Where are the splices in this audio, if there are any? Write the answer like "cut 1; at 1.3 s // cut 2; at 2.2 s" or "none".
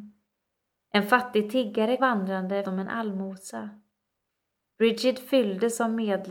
cut 1; at 2.0 s // cut 2; at 2.6 s